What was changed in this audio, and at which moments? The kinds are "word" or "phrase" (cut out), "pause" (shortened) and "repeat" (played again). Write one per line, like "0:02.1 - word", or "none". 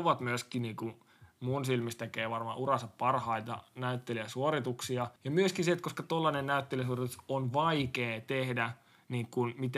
0:05.2 - pause